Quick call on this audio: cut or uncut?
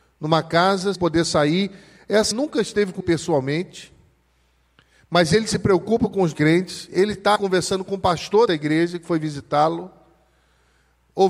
cut